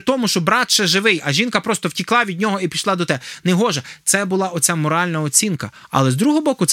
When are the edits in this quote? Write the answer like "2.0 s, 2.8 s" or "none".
none